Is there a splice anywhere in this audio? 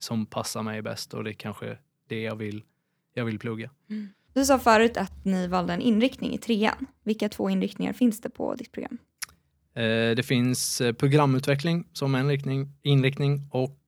no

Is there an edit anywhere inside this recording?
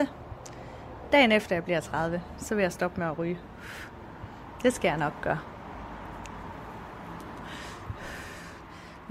no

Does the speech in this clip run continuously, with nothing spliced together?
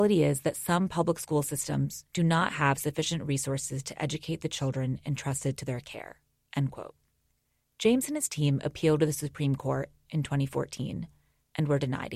yes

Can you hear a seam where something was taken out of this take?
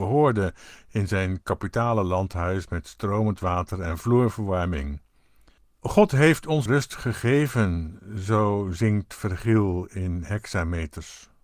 yes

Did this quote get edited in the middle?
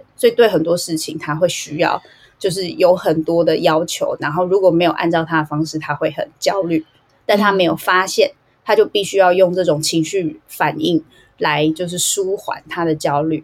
no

